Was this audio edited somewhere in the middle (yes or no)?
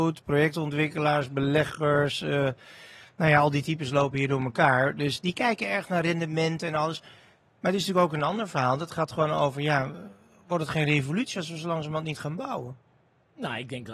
no